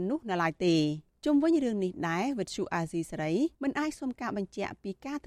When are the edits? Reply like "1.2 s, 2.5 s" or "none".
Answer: 1.1 s, 3.6 s